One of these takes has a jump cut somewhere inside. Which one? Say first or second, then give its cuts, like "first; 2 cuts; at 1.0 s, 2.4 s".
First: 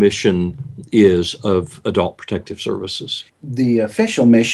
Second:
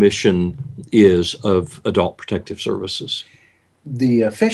first; 1 cut; at 3.3 s